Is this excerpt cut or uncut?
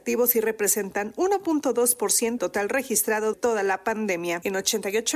cut